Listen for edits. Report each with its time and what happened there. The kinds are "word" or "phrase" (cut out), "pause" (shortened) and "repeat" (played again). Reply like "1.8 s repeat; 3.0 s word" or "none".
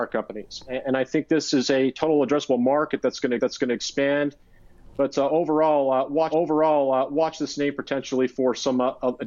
3.4 s repeat; 6.3 s repeat